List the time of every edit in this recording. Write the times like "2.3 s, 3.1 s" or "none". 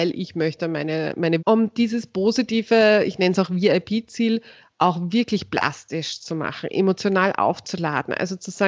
1.4 s